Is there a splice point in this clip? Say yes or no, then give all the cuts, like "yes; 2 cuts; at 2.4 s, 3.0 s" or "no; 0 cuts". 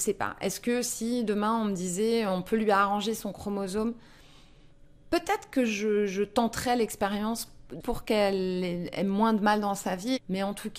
yes; 2 cuts; at 5.0 s, 7.8 s